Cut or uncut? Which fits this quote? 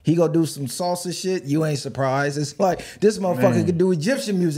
uncut